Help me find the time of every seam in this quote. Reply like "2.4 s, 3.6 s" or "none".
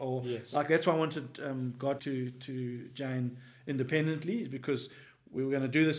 2.0 s

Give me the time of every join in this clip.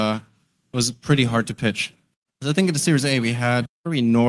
none

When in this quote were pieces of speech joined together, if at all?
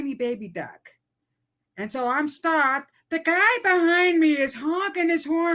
none

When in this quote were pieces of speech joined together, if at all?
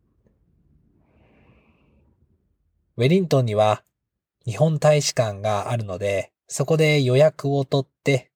6.4 s

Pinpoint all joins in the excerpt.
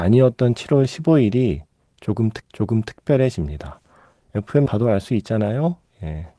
2.4 s, 4.7 s

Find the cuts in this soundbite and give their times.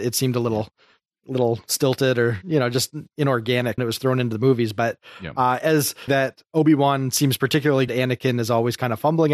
3.8 s, 6.1 s, 7.9 s

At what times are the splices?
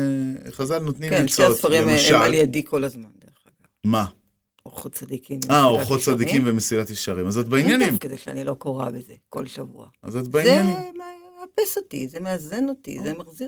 8.0 s

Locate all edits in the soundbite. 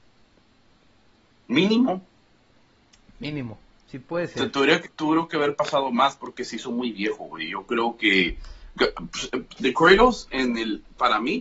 4.8 s

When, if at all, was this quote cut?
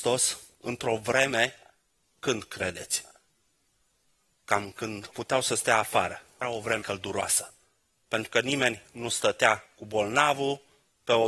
2.0 s, 5.1 s, 6.4 s, 6.8 s

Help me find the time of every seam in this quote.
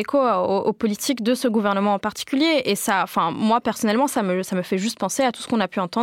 none

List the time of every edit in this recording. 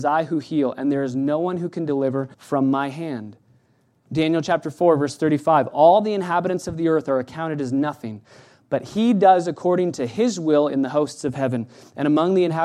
2.3 s

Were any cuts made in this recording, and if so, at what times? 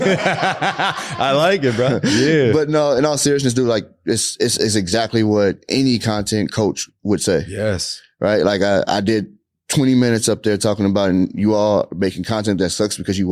none

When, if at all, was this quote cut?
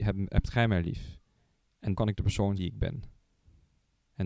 1.9 s, 2.6 s

